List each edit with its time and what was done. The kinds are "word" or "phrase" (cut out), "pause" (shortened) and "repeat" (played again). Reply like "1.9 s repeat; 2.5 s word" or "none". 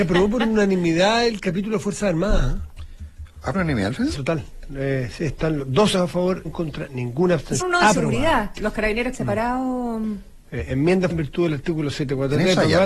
3.5 s word; 4.1 s word; 5.9 s word; 6.4 s word; 7.6 s word; 8.6 s word; 9.1 s word; 11.1 s word